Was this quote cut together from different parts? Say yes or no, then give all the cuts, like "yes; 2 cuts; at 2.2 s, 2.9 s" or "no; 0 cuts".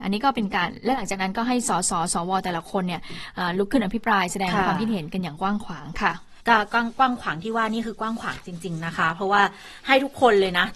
yes; 1 cut; at 6.4 s